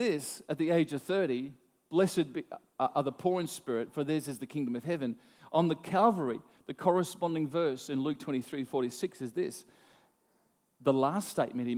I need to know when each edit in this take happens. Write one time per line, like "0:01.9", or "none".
none